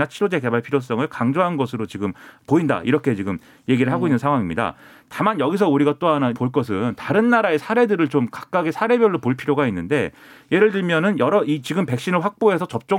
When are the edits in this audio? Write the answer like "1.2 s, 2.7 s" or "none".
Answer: 6.3 s